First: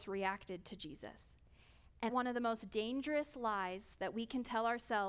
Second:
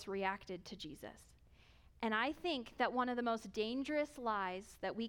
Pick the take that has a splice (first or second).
first